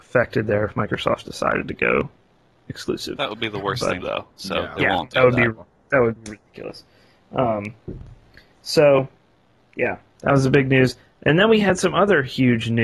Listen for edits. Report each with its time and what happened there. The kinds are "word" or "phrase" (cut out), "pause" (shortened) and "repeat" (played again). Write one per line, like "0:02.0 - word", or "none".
0:04.0 - phrase